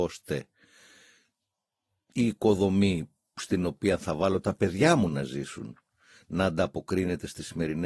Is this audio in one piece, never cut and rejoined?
yes; 0 cuts

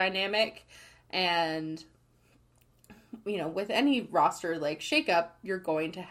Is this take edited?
no; 0 cuts

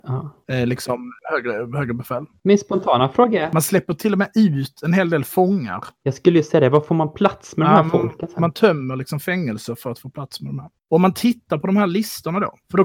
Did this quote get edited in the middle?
yes; 1 cut; at 10.8 s

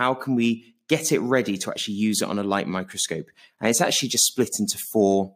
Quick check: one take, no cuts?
yes; 0 cuts

